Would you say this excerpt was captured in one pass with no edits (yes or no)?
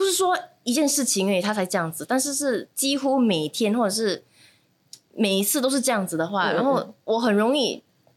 no